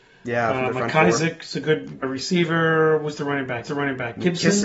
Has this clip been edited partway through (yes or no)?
yes